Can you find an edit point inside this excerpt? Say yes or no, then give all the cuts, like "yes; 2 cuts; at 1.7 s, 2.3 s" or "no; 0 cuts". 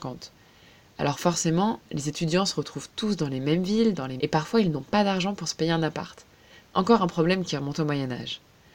yes; 1 cut; at 4.2 s